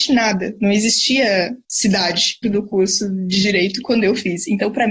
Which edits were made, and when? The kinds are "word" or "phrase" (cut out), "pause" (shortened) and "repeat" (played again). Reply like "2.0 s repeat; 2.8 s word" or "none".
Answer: 2.4 s word